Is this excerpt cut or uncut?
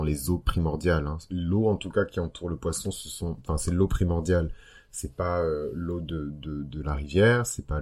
uncut